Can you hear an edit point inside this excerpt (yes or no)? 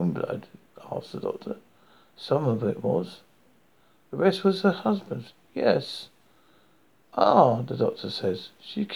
no